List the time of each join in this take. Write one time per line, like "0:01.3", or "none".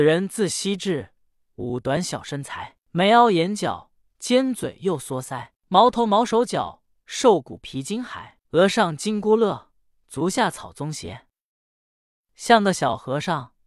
0:02.8
0:05.6
0:08.4

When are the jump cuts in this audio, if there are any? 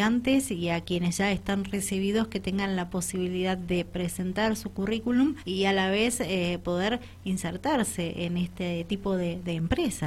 0:05.4

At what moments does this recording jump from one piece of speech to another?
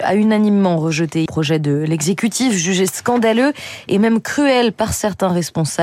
0:01.3

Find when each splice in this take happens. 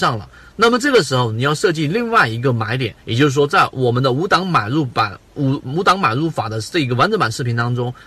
0:03.0

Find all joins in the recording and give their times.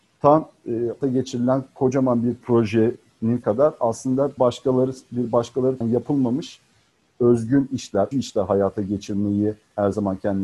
0:01.0
0:03.4
0:04.4
0:05.8
0:08.1

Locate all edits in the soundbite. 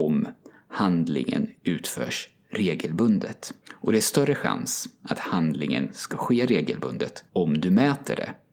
0:03.6
0:07.3

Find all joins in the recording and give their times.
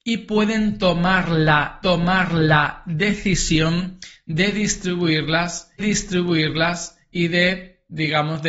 0:01.8
0:05.8

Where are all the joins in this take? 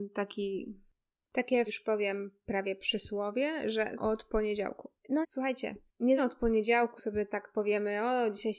0:01.7
0:04.0
0:05.2
0:06.2
0:07.0

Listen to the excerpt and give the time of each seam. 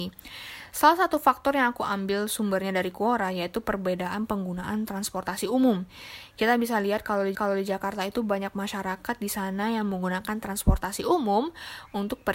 0:07.3

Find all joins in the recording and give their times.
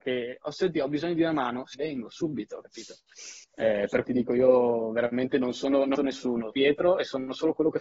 0:01.7
0:03.4
0:04.0
0:06.0
0:06.5

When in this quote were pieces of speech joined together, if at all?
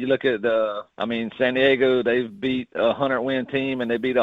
0:00.9

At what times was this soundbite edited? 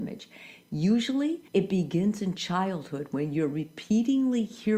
0:01.5

